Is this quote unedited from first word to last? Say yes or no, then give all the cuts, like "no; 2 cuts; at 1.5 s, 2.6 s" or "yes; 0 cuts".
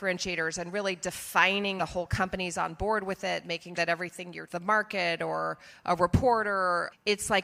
no; 3 cuts; at 1.8 s, 3.7 s, 4.5 s